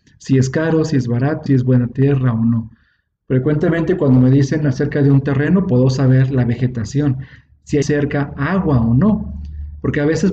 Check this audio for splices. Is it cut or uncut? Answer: cut